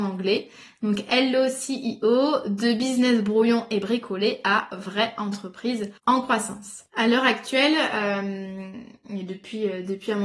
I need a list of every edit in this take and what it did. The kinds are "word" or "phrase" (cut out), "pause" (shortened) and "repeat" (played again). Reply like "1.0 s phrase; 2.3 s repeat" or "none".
6.0 s pause